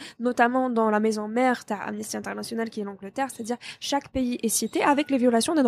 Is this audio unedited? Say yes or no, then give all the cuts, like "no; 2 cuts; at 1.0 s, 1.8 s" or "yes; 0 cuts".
yes; 0 cuts